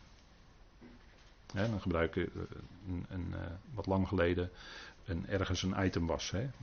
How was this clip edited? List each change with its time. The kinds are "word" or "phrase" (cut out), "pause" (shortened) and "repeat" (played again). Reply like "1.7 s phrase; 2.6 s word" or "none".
2.7 s pause; 3.6 s pause